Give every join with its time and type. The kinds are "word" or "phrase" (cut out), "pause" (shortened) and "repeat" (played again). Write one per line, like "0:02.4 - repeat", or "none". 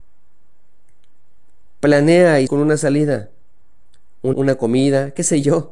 0:02.5 - word
0:04.3 - word